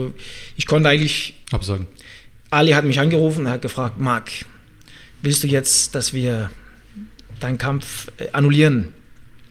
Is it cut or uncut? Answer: cut